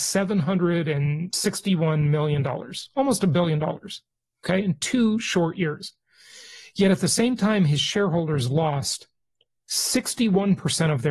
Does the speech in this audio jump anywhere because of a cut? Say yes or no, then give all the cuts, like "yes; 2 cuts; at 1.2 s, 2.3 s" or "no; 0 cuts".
no; 0 cuts